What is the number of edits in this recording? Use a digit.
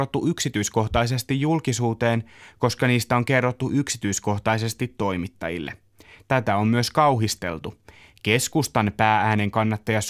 0